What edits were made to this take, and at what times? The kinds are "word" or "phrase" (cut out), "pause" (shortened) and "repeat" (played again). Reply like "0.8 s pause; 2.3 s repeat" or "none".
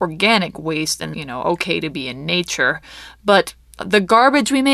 1.1 s word